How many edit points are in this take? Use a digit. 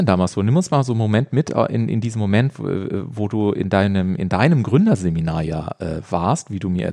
0